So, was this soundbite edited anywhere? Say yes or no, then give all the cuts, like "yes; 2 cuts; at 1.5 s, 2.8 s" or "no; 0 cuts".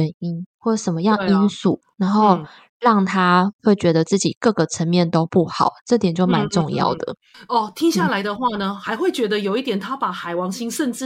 yes; 1 cut; at 1.8 s